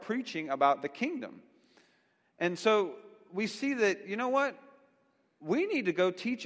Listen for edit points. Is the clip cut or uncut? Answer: uncut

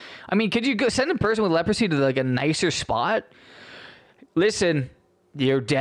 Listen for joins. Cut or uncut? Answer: uncut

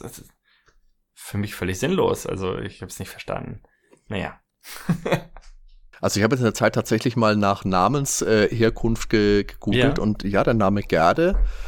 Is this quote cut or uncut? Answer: uncut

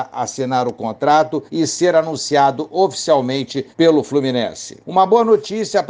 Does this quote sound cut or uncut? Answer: cut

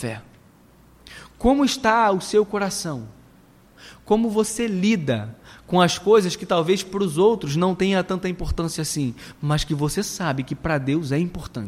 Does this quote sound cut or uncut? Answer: uncut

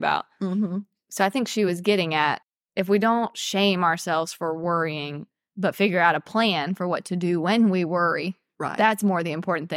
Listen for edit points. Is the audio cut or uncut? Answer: uncut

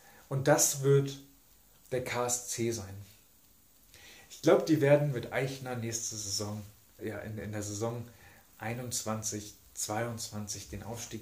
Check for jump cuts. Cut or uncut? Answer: cut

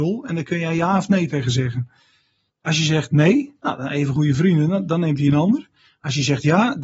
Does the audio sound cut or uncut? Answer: uncut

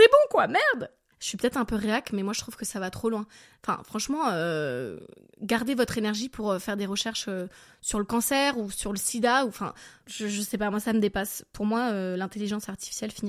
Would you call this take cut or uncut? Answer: uncut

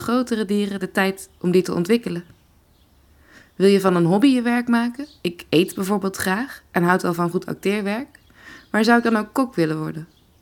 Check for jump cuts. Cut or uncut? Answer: uncut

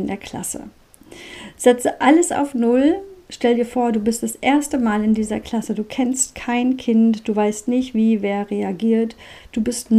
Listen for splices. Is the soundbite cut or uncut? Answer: uncut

